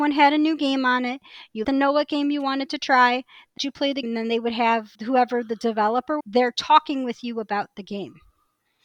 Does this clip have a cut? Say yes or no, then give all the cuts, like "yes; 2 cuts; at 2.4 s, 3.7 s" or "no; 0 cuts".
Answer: yes; 5 cuts; at 1.6 s, 3.6 s, 4.0 s, 4.9 s, 6.2 s